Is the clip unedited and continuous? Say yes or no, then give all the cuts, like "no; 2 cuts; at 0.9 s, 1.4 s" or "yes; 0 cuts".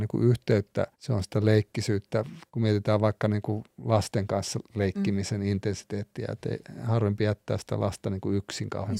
no; 2 cuts; at 0.9 s, 2.5 s